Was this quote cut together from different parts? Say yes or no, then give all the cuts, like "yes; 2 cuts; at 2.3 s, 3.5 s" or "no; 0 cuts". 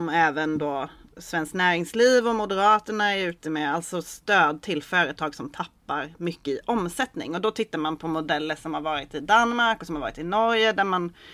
no; 0 cuts